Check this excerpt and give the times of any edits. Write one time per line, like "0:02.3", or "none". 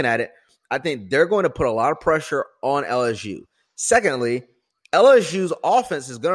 none